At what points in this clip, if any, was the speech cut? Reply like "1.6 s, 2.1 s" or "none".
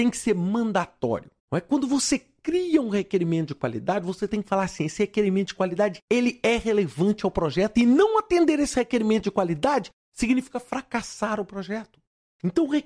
1.4 s, 6.0 s